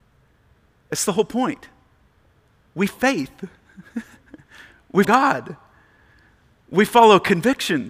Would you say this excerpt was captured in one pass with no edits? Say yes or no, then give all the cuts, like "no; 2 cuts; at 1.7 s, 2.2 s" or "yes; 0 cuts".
no; 2 cuts; at 2.9 s, 5.0 s